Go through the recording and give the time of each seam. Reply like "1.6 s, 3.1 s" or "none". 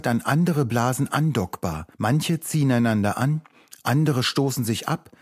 1.9 s